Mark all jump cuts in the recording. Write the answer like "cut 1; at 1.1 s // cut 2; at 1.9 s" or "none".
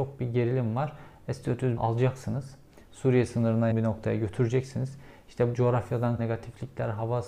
cut 1; at 1.8 s // cut 2; at 3.7 s // cut 3; at 5.5 s // cut 4; at 6.2 s